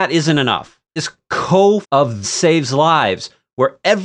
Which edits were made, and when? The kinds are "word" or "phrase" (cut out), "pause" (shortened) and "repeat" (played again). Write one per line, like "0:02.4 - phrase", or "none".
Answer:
0:01.0 - word
0:01.8 - word
0:02.2 - word